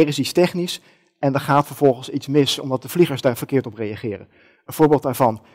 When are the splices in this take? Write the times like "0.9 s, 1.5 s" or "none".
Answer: none